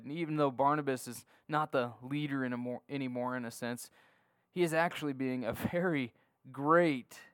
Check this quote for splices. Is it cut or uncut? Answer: uncut